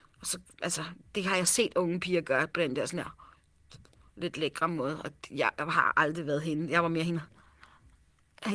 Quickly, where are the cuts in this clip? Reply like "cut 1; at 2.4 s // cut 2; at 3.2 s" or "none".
none